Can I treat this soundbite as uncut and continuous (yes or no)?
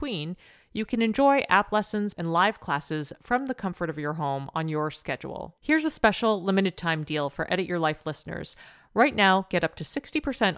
no